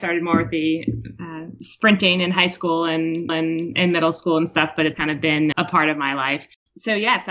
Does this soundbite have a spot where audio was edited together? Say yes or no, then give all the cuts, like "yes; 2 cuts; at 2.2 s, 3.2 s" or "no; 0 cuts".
yes; 3 cuts; at 3.3 s, 4.9 s, 5.5 s